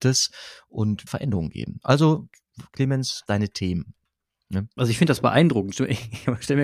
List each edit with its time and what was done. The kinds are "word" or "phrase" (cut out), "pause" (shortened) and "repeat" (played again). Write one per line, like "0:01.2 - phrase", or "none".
0:01.1 - phrase
0:03.3 - phrase